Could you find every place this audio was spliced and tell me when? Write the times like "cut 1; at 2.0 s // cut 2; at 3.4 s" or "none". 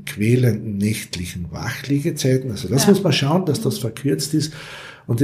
none